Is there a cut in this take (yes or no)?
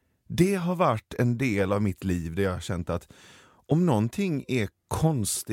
no